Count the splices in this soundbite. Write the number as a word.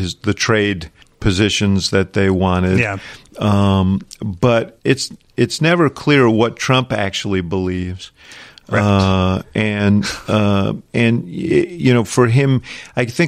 three